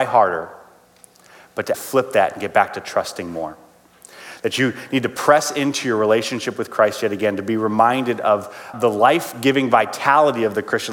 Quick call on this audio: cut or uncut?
cut